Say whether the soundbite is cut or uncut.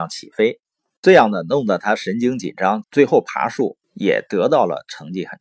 cut